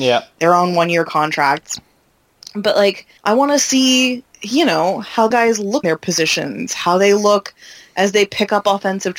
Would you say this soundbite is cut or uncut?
cut